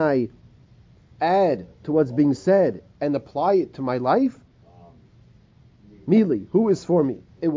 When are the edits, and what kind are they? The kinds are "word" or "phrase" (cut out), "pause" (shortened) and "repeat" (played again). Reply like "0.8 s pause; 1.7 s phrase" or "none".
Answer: none